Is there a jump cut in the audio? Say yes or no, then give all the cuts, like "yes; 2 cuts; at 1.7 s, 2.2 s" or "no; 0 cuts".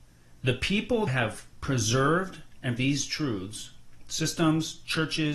yes; 2 cuts; at 1.1 s, 2.8 s